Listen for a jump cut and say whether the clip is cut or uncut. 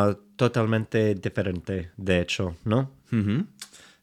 uncut